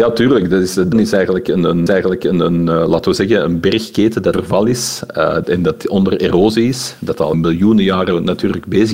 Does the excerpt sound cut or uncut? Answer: cut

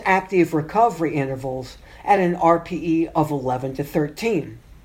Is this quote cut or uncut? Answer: uncut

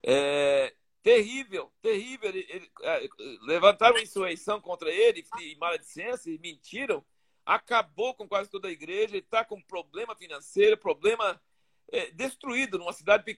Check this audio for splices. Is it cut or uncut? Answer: uncut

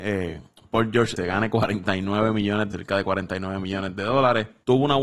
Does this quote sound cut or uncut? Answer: cut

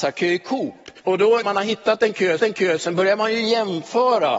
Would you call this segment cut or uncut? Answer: cut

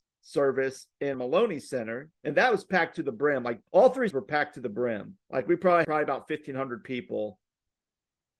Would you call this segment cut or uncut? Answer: cut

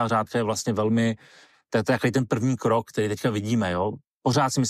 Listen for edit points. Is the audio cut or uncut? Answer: uncut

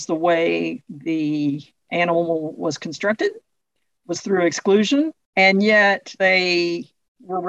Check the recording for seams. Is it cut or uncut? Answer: uncut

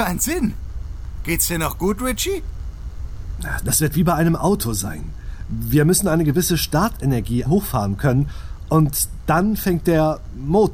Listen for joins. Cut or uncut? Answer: cut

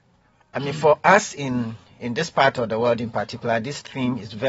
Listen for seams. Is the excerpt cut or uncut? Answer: uncut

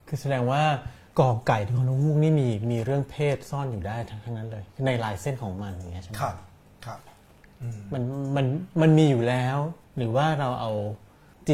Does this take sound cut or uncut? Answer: cut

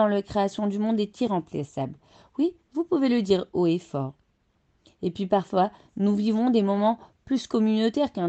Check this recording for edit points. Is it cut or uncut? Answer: uncut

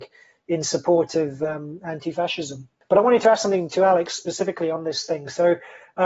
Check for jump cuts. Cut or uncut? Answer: uncut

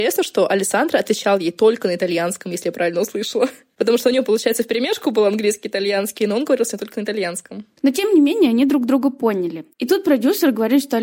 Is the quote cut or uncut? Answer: uncut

